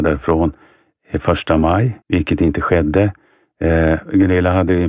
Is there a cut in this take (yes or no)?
yes